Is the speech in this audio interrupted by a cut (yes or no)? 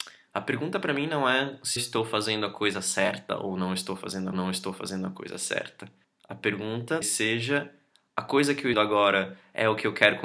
yes